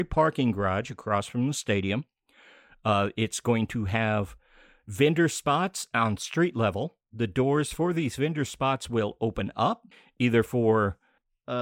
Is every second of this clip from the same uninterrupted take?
no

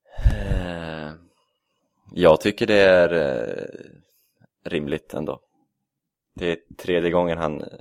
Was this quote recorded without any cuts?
yes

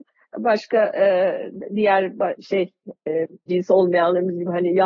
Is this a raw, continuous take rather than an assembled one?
no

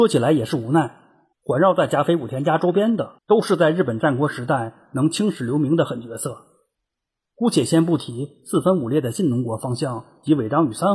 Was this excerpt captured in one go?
no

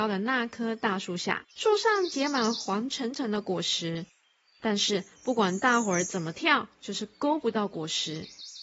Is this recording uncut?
no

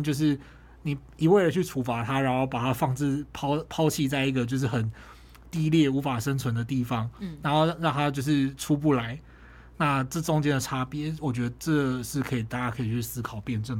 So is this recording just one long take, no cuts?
yes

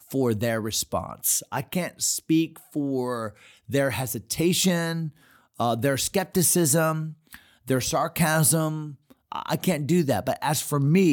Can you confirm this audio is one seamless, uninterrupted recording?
yes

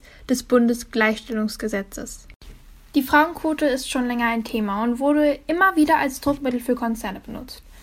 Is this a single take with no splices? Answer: yes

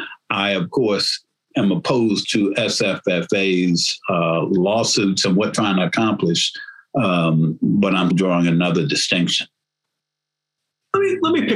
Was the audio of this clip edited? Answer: yes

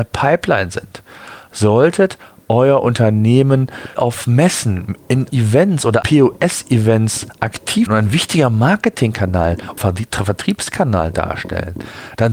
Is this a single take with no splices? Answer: no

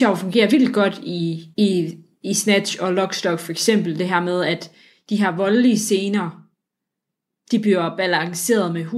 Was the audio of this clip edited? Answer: yes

